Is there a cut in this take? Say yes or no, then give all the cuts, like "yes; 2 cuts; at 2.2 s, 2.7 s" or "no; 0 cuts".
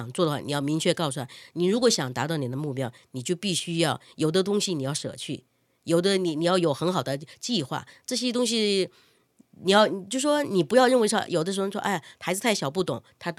no; 0 cuts